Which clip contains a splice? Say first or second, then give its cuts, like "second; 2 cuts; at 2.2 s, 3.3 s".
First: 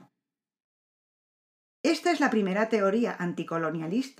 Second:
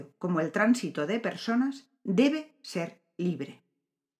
second; 1 cut; at 1.9 s